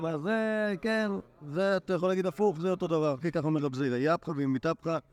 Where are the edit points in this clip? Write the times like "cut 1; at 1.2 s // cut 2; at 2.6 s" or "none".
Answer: none

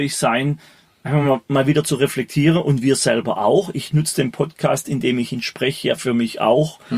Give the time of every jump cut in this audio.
none

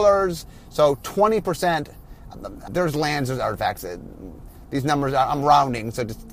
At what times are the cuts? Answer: cut 1; at 2.7 s

